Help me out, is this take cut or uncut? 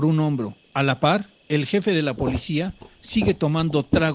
uncut